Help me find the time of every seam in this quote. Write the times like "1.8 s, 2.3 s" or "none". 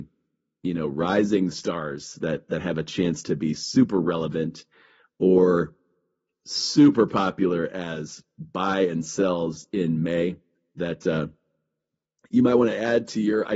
none